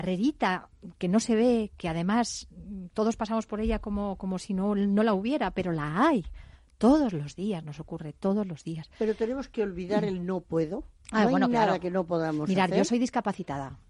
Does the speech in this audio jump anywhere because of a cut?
no; 0 cuts

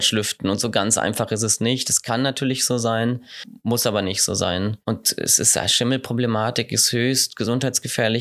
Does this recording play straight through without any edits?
no; 1 cut; at 4.8 s

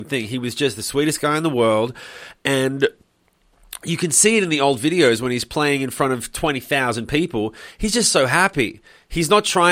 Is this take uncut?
yes; 0 cuts

